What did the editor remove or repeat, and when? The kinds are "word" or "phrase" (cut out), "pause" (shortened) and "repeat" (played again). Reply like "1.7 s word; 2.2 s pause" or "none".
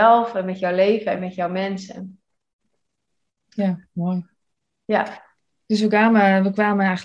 none